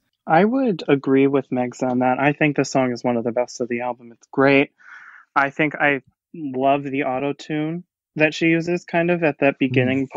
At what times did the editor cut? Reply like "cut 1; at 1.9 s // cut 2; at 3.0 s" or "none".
none